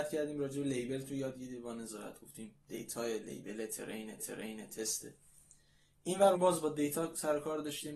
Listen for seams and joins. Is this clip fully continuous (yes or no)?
no